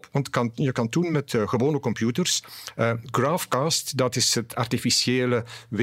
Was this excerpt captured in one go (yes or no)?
yes